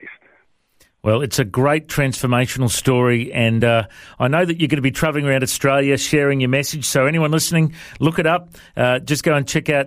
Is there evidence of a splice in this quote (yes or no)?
no